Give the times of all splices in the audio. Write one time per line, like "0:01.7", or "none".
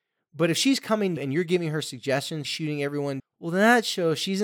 0:01.2
0:02.4
0:03.2